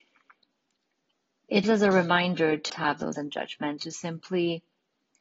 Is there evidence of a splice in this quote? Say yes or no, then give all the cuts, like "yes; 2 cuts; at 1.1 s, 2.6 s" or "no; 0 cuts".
yes; 4 cuts; at 1.6 s, 2.7 s, 3.1 s, 3.8 s